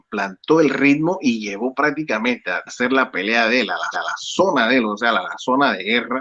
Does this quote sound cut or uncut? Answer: cut